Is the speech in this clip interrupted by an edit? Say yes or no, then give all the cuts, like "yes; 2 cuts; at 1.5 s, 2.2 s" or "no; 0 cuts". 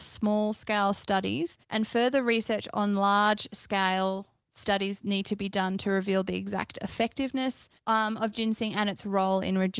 yes; 2 cuts; at 1.6 s, 7.8 s